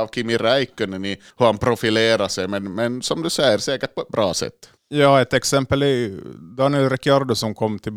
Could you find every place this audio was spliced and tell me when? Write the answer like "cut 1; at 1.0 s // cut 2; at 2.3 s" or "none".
cut 1; at 1.3 s // cut 2; at 4.8 s